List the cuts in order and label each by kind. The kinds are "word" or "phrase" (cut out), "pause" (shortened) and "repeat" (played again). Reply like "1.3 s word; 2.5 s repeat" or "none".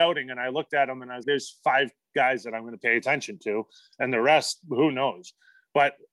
1.2 s word